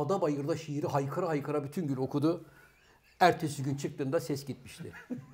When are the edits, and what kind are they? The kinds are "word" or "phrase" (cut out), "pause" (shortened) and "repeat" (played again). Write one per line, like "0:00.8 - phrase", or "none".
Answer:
none